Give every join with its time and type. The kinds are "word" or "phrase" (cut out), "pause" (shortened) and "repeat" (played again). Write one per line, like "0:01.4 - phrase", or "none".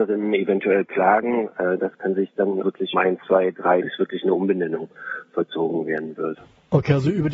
0:02.6 - word
0:02.9 - word
0:03.8 - phrase